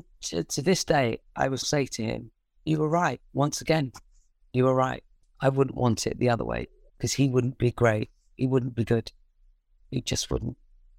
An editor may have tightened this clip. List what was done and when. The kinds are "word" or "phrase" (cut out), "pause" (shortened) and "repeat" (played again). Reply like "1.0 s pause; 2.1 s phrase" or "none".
1.6 s word